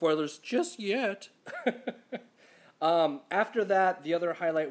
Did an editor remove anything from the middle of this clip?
no; 0 cuts

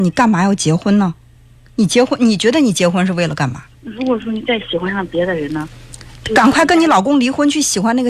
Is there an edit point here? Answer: yes; 1 cut; at 3.7 s

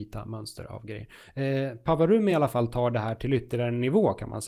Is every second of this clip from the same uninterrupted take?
yes; 0 cuts

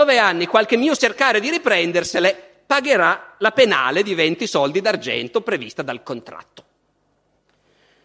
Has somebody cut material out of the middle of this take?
yes; 1 cut; at 1.0 s

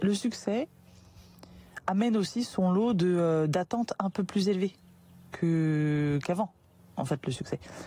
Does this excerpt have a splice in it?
no; 0 cuts

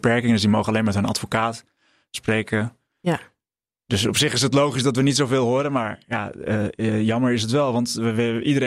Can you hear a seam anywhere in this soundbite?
no; 0 cuts

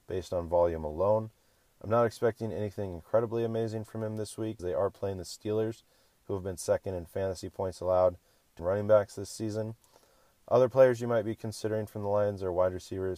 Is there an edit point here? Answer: yes; 2 cuts; at 4.6 s, 8.6 s

